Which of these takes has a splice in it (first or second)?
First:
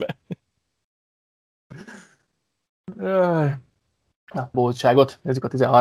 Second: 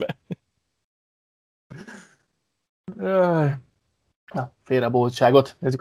first